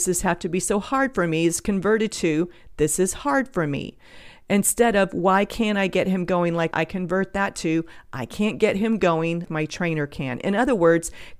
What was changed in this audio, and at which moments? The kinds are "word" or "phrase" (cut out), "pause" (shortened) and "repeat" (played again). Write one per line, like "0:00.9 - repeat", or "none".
0:06.7 - phrase
0:09.5 - word